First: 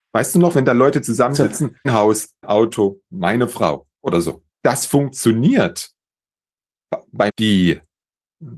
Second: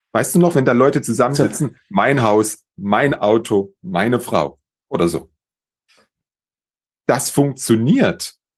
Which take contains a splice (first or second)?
first